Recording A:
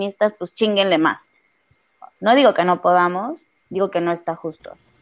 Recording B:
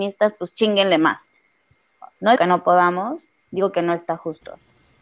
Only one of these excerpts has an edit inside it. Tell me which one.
B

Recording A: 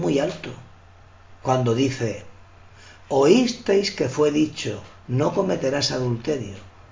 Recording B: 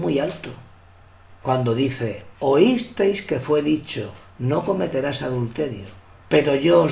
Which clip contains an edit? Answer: B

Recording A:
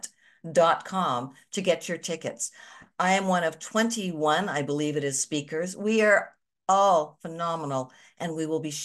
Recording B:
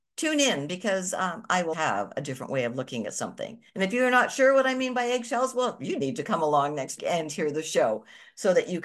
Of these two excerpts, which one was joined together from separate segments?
B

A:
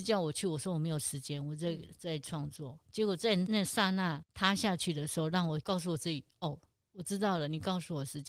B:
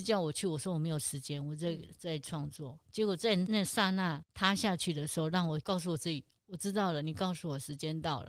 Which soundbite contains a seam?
B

